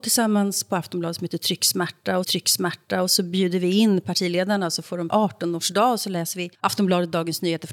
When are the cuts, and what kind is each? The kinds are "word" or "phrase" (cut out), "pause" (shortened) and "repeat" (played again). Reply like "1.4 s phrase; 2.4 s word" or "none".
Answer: 2.2 s repeat; 5.1 s phrase; 6.5 s pause